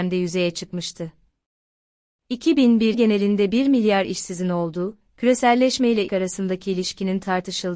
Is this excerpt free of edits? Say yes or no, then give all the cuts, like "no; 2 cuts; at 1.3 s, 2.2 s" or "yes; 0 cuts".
no; 2 cuts; at 2.9 s, 6.1 s